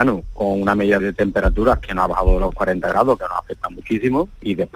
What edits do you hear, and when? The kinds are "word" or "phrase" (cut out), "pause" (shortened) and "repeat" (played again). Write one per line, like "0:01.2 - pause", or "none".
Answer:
0:01.0 - word